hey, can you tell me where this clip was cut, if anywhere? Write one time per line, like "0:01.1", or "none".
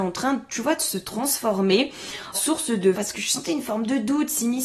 0:02.3
0:02.9